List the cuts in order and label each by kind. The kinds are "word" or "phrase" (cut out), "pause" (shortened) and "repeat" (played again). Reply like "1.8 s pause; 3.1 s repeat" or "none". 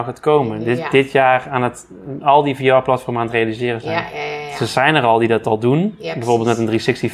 none